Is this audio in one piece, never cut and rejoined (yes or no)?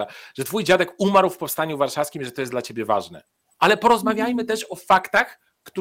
yes